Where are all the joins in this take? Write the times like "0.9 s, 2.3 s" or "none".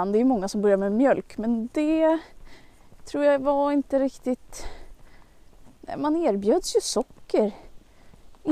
none